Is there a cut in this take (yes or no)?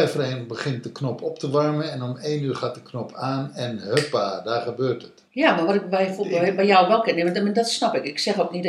yes